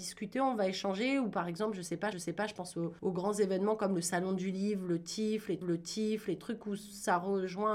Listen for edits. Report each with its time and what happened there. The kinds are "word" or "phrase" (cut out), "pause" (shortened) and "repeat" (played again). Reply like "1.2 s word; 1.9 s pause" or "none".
2.1 s repeat; 5.6 s repeat